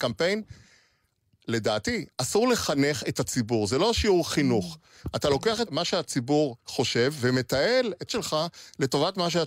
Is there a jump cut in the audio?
yes; 3 cuts; at 5.7 s, 6.6 s, 8.1 s

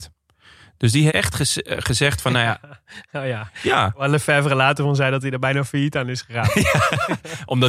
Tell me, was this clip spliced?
yes; 1 cut; at 1.1 s

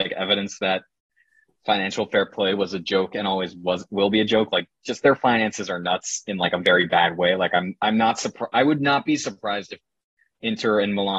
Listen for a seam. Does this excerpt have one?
no; 0 cuts

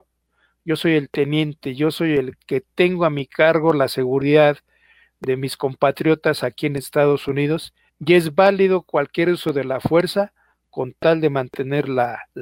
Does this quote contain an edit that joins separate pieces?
yes; 1 cut; at 7.9 s

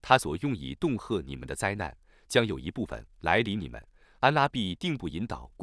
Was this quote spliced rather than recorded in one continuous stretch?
no; 0 cuts

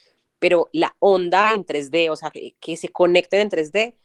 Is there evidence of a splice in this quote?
no; 0 cuts

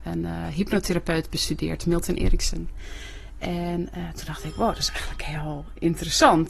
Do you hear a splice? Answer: no; 0 cuts

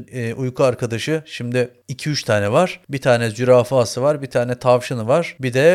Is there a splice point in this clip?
no; 0 cuts

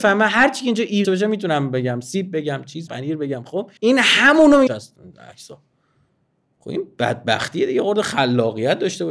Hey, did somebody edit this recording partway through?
yes; 4 cuts; at 1.0 s, 2.9 s, 3.8 s, 4.7 s

